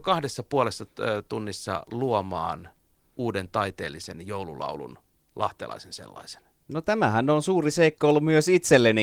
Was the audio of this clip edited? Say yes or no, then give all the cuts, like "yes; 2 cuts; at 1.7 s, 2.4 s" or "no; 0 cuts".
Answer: no; 0 cuts